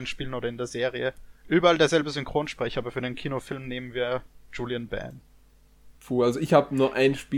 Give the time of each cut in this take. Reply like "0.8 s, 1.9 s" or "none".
1.4 s, 6.0 s